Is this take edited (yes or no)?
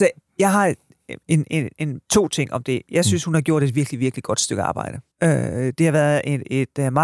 yes